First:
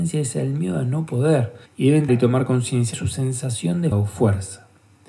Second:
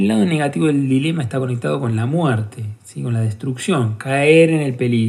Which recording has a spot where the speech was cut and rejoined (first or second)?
first